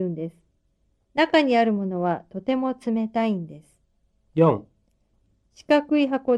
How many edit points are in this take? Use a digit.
1